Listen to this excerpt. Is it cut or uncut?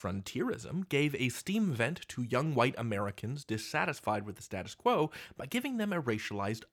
uncut